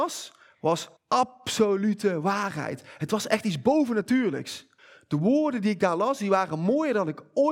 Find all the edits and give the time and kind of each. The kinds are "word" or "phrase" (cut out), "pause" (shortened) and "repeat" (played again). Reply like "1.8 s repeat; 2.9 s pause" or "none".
1.0 s pause; 4.8 s pause